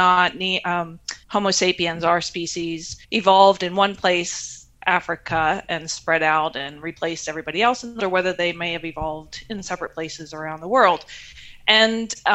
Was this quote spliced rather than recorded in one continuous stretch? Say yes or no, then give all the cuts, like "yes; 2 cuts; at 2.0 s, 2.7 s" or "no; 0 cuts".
yes; 3 cuts; at 1.2 s, 3.0 s, 8.0 s